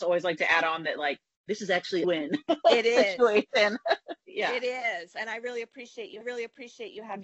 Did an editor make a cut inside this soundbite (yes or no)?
yes